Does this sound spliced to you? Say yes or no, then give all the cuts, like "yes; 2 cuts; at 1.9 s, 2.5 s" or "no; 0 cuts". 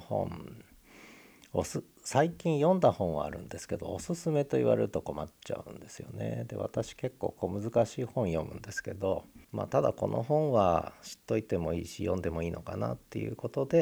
yes; 1 cut; at 9.4 s